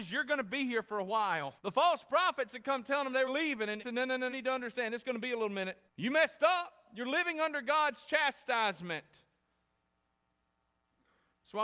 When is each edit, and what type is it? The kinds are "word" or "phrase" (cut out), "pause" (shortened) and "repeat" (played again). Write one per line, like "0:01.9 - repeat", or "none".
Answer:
0:01.6 - pause
0:03.3 - phrase
0:03.8 - phrase
0:04.3 - phrase
0:05.9 - pause